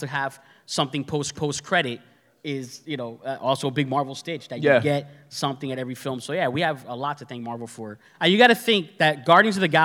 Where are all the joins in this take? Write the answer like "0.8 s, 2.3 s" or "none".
1.3 s